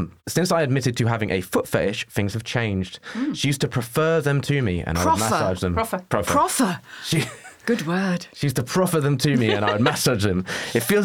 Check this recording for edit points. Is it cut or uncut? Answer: uncut